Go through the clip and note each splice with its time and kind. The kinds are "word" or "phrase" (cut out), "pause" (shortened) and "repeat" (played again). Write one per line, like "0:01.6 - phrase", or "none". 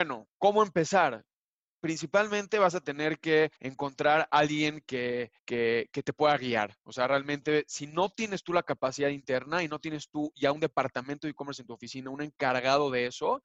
0:03.6 - pause
0:05.4 - pause